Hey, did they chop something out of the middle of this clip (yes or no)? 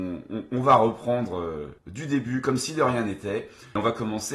yes